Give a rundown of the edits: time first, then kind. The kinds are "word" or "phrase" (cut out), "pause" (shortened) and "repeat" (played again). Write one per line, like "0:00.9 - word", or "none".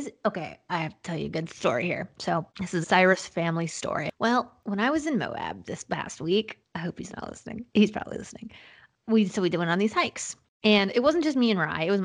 0:02.5 - pause
0:02.8 - phrase
0:07.7 - pause